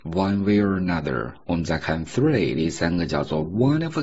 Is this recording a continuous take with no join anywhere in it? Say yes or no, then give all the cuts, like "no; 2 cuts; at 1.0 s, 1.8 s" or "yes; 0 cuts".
yes; 0 cuts